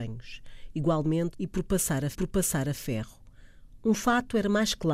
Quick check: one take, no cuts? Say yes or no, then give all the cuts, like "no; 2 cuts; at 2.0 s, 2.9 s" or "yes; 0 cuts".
no; 2 cuts; at 1.3 s, 2.1 s